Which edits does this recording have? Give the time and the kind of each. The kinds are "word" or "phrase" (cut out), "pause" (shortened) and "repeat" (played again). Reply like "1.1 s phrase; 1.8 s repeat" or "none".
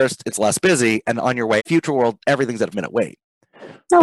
1.1 s word; 1.6 s word; 2.7 s word

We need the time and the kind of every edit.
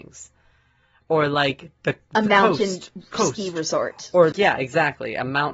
4.3 s word

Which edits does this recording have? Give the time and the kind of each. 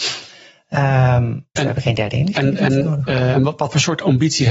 1.6 s word; 3.3 s word

